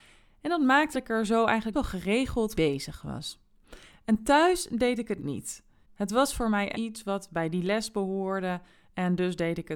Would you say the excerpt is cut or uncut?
cut